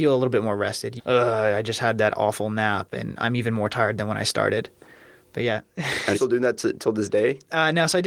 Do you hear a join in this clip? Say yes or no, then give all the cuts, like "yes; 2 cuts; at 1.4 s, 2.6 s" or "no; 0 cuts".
yes; 2 cuts; at 1.0 s, 6.1 s